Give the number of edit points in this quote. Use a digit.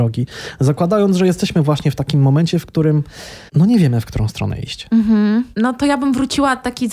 2